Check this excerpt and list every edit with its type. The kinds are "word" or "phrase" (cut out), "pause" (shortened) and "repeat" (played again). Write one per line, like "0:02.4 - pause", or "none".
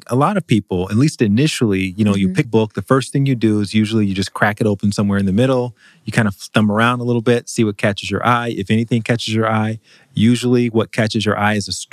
0:02.4 - phrase